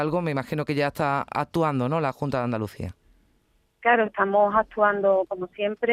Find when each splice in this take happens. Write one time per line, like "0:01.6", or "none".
none